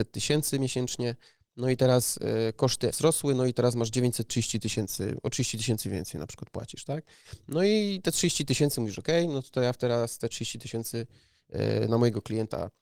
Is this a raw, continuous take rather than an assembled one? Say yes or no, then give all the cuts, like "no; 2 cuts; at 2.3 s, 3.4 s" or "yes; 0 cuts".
no; 1 cut; at 2.9 s